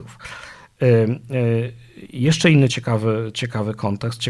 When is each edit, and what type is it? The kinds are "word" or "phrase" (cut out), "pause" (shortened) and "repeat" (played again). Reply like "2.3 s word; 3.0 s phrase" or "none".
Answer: none